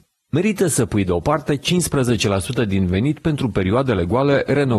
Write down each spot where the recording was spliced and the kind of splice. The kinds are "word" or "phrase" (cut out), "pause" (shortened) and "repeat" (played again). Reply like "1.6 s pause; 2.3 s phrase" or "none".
none